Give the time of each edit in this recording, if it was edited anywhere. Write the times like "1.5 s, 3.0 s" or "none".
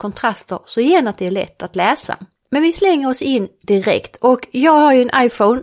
none

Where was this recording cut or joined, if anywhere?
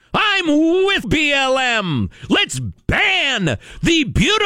1.0 s

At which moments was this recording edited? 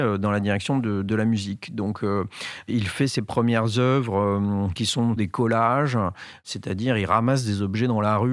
5.2 s

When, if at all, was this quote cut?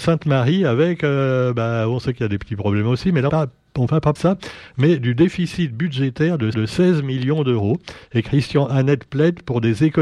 3.3 s, 4.2 s, 6.5 s

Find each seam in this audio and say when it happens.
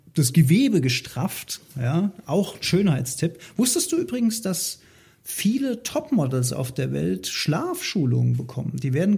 none

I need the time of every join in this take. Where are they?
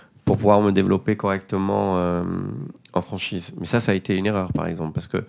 none

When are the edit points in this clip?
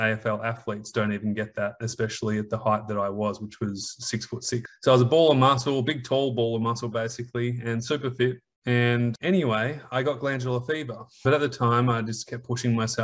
none

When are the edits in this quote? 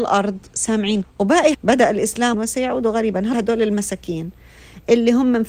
1.0 s, 1.5 s, 2.3 s, 3.3 s

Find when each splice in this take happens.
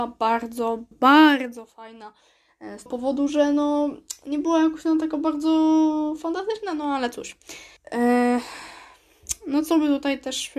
0.9 s, 2.9 s, 7.8 s

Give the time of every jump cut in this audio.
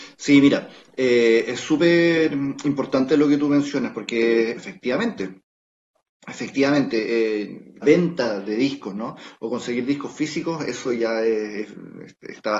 4.6 s, 7.8 s

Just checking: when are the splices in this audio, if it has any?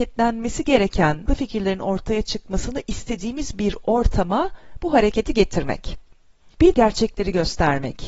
1.3 s, 6.7 s

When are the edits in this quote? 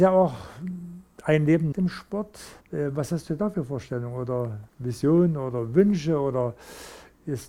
1.7 s, 2.6 s, 4.7 s

